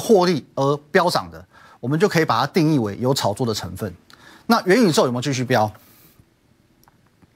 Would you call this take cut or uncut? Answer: uncut